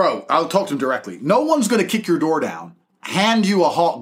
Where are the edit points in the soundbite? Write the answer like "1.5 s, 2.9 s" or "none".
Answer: none

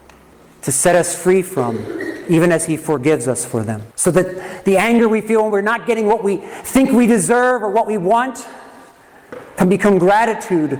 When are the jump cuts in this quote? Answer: 3.9 s

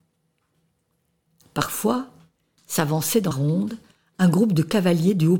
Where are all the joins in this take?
3.3 s

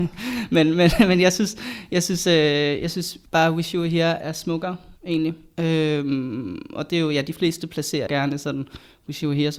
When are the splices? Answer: 3.3 s, 4.2 s, 5.0 s, 8.1 s

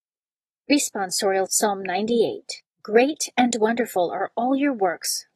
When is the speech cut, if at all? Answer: 1.5 s, 2.7 s

